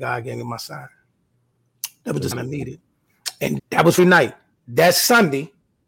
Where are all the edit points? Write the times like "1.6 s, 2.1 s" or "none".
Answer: 2.3 s, 3.6 s, 4.0 s